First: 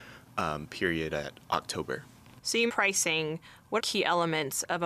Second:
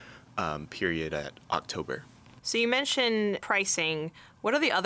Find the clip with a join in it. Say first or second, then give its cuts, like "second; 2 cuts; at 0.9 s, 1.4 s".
first; 2 cuts; at 2.7 s, 3.8 s